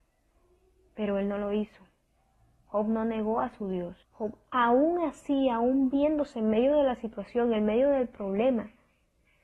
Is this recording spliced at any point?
yes; 1 cut; at 4.0 s

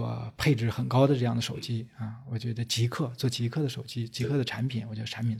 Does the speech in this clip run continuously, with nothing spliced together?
yes; 0 cuts

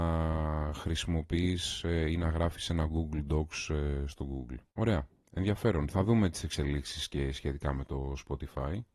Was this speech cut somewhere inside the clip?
yes; 1 cut; at 4.7 s

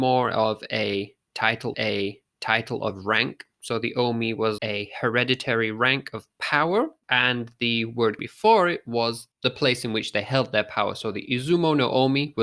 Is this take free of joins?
no; 4 cuts; at 1.7 s, 4.6 s, 8.2 s, 9.3 s

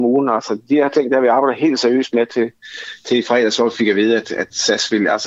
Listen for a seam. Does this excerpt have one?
no; 0 cuts

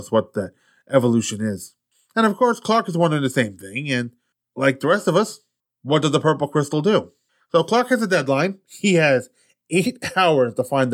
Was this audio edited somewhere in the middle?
no; 0 cuts

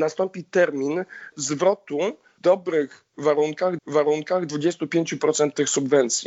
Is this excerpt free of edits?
no; 2 cuts; at 2.4 s, 3.8 s

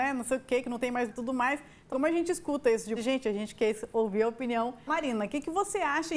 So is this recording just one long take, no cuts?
no; 4 cuts; at 1.1 s, 1.9 s, 3.0 s, 4.9 s

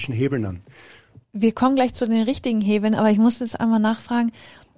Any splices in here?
yes; 1 cut; at 1.2 s

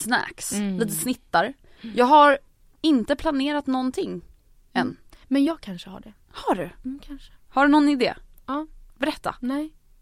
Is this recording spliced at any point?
no; 0 cuts

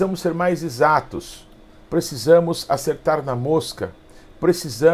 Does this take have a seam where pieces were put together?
yes; 1 cut; at 1.7 s

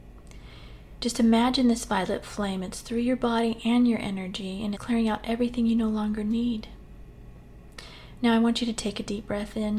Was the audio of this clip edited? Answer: yes; 1 cut; at 4.8 s

